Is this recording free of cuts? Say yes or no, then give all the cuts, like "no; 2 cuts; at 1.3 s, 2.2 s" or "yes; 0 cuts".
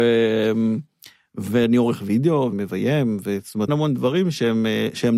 no; 2 cuts; at 2.5 s, 3.7 s